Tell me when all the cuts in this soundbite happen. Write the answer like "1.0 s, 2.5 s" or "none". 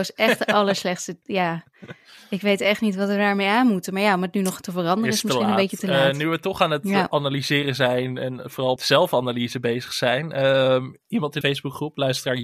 8.8 s, 11.4 s